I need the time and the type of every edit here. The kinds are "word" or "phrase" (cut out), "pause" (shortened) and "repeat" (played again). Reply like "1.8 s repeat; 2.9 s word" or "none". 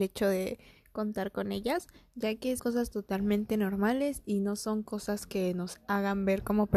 2.6 s word